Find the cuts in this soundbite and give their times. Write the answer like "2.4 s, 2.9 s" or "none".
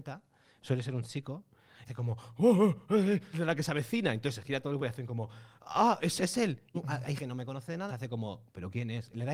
1.8 s, 3.3 s, 4.8 s, 6.2 s, 6.7 s, 7.2 s, 7.9 s